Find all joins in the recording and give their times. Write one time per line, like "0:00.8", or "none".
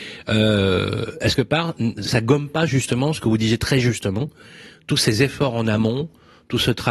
0:01.3
0:02.0